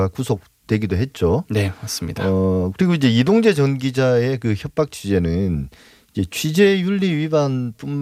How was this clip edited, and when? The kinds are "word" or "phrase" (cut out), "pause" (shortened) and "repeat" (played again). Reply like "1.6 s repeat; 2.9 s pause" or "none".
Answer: none